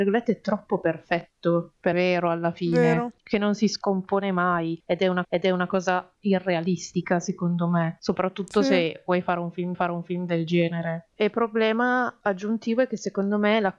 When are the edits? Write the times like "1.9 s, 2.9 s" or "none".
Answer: 1.9 s, 5.2 s, 9.7 s